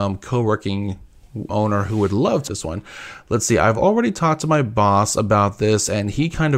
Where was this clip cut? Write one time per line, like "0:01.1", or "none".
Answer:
0:01.5
0:02.5